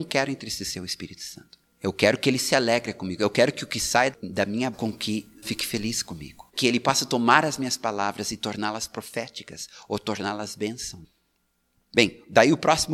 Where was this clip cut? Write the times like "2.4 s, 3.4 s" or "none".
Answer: 1.6 s, 4.7 s, 5.4 s, 6.5 s